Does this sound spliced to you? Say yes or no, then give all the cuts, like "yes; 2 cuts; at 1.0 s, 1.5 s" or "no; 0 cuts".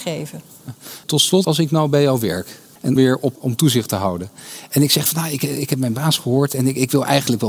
yes; 3 cuts; at 1.4 s, 3.0 s, 3.3 s